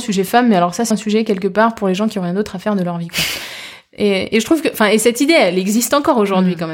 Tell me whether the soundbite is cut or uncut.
cut